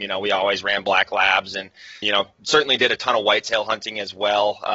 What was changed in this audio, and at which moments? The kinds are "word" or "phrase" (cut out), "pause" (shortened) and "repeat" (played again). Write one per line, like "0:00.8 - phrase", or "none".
0:02.0 - word